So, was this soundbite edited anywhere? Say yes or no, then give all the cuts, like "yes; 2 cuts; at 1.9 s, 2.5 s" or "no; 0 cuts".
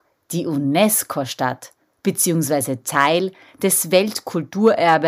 no; 0 cuts